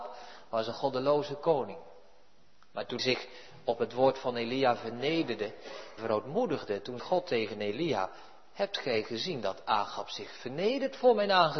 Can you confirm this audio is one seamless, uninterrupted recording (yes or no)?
no